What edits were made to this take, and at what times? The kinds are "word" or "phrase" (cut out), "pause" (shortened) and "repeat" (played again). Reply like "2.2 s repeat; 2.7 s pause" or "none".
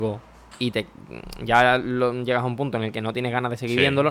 none